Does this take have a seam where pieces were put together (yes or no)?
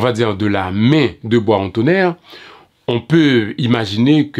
no